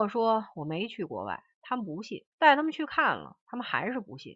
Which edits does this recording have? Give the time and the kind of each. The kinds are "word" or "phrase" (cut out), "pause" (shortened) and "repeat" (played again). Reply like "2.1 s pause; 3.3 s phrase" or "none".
2.3 s pause